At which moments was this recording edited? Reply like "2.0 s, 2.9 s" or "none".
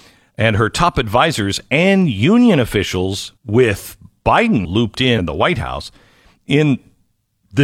3.4 s, 4.6 s, 5.2 s